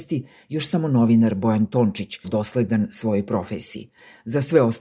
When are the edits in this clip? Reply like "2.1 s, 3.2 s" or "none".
2.2 s